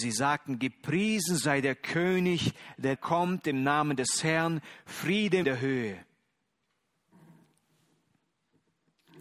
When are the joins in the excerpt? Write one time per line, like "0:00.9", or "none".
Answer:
0:03.0
0:05.4